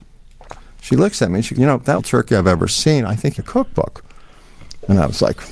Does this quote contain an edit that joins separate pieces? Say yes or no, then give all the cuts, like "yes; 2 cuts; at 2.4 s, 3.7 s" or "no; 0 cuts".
yes; 3 cuts; at 1.5 s, 2.0 s, 3.4 s